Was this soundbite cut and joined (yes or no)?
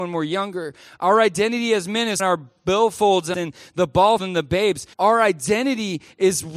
yes